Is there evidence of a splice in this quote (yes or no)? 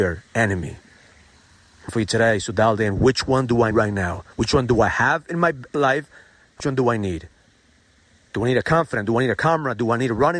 yes